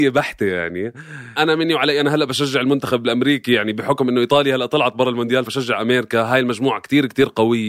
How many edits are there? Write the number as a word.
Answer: two